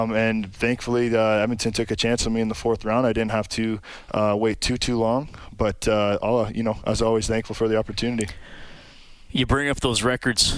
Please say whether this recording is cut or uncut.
uncut